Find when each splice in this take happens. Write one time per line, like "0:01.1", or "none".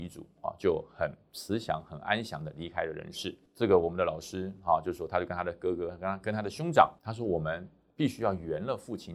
0:07.0